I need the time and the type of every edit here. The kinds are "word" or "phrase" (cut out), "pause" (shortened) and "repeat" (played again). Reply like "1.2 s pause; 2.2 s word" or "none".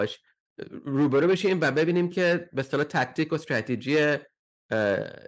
none